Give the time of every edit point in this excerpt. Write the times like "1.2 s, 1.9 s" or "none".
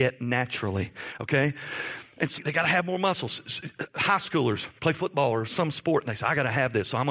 2.4 s